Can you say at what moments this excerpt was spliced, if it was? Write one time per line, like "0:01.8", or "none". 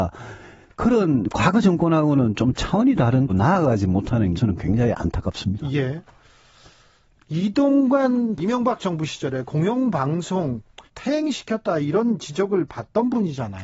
0:03.3
0:04.3
0:08.4
0:10.9